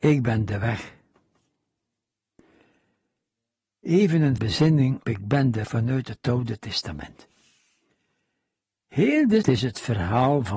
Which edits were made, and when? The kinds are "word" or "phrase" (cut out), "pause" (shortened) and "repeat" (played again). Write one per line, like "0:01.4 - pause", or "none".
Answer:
0:04.4 - word
0:05.0 - word
0:05.6 - word
0:09.4 - word

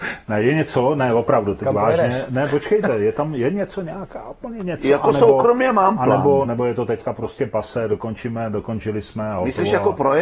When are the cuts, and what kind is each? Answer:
0:06.4 - word

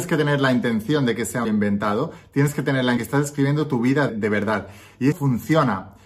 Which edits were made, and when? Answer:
0:01.4 - word
0:03.0 - phrase
0:04.1 - word
0:05.1 - word

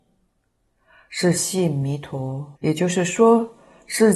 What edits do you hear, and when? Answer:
0:02.6 - pause

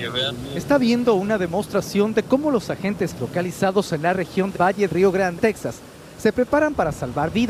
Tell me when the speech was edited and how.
0:03.2 - word
0:04.5 - word
0:04.9 - word
0:05.4 - word

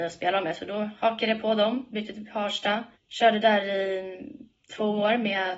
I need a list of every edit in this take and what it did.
0:02.9 - pause

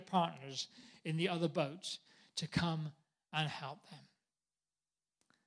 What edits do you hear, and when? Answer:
none

